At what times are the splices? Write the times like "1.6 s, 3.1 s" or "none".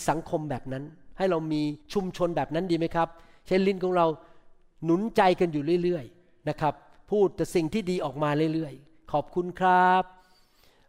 1.8 s